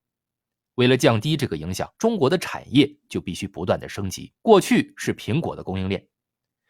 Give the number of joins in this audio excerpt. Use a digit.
2